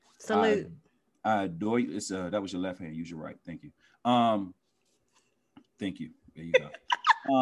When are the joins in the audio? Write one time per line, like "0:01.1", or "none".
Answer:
none